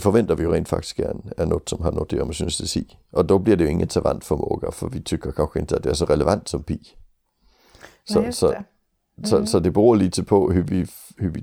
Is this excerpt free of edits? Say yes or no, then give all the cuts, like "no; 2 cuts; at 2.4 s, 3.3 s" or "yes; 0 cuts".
yes; 0 cuts